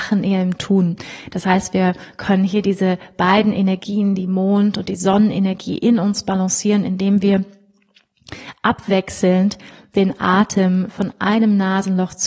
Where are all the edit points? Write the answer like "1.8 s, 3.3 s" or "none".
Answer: none